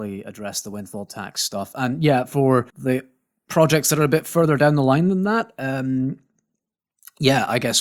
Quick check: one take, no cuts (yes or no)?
no